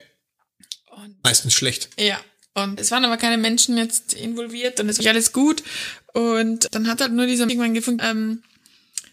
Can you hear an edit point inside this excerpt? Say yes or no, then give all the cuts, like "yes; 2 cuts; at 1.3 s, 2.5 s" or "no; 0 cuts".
yes; 5 cuts; at 2.8 s, 5.0 s, 6.7 s, 7.5 s, 8.0 s